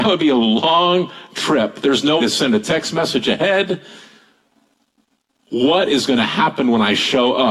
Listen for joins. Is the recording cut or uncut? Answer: cut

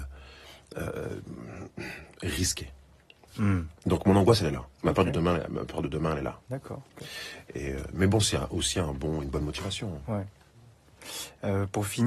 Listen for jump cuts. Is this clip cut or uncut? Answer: cut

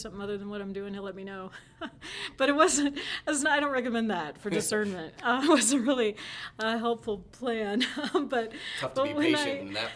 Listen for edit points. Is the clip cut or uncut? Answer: uncut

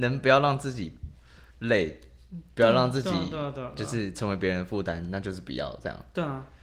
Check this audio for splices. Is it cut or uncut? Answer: cut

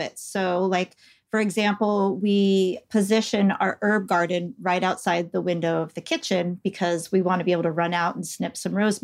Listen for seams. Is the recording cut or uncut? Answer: uncut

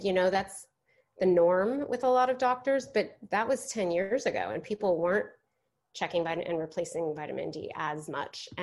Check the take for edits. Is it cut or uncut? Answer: uncut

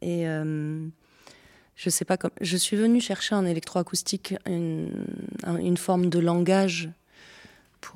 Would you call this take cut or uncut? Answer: uncut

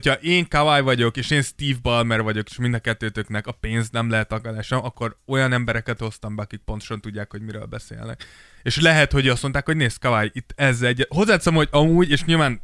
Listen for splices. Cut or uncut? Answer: uncut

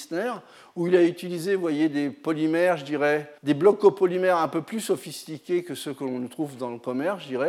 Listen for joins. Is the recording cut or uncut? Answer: cut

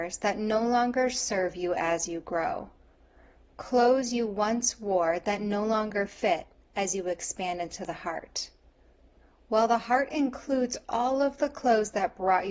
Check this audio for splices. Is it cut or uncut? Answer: uncut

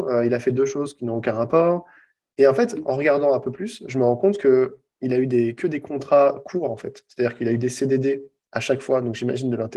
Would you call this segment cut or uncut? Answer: uncut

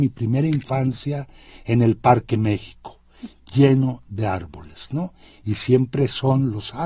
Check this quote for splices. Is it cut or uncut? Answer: uncut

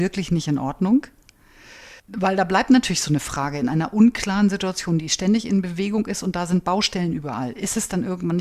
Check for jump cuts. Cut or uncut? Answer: cut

